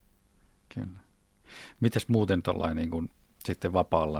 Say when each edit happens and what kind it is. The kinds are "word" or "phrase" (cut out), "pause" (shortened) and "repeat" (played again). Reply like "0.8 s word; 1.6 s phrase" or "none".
none